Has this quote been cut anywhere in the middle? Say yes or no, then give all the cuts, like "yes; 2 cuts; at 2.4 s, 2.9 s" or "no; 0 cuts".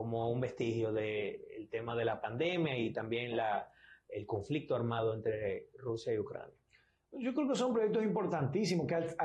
no; 0 cuts